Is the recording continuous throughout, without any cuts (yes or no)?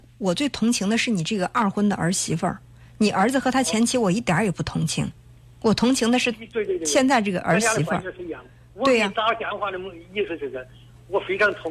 yes